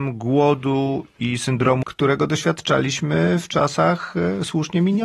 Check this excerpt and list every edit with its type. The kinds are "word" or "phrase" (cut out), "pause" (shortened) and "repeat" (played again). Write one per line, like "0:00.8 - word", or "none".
0:01.8 - word